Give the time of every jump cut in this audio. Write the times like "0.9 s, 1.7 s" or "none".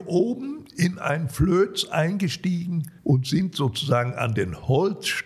3.0 s